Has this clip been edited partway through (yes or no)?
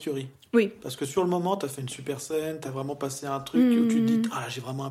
no